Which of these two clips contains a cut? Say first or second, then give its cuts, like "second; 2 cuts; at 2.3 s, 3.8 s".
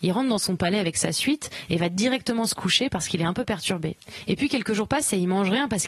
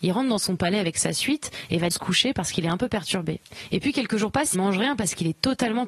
second; 2 cuts; at 1.9 s, 4.5 s